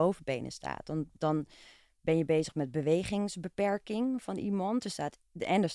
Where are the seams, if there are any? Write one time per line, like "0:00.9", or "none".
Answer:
none